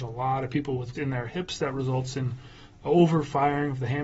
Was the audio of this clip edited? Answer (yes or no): yes